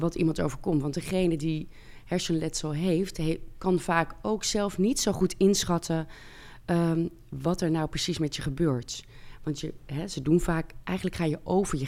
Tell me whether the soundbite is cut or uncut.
uncut